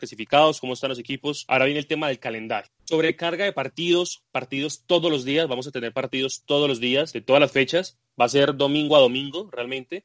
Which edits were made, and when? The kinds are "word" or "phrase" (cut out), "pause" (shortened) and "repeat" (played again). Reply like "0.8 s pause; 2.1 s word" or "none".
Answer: none